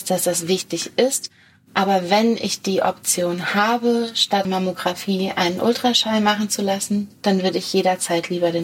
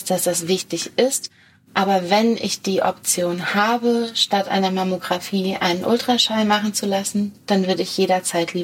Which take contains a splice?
first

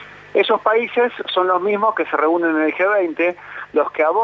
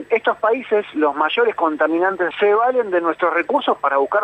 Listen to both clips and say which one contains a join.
second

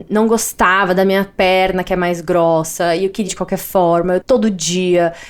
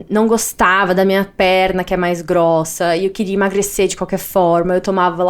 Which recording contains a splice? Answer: first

